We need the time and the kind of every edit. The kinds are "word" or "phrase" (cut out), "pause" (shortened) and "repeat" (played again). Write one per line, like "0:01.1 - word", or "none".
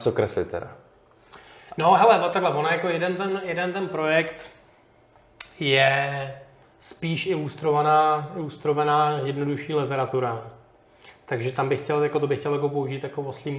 none